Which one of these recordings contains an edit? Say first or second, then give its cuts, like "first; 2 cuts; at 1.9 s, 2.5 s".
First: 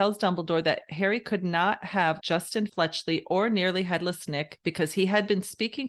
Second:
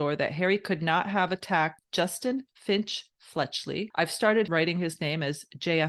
first; 2 cuts; at 2.2 s, 2.7 s